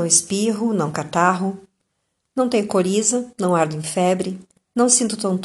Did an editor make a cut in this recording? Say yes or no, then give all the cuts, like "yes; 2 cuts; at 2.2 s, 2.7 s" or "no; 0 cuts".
no; 0 cuts